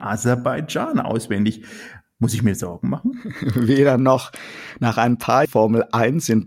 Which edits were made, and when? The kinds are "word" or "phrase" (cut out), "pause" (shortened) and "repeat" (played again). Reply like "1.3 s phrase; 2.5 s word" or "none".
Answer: 5.4 s word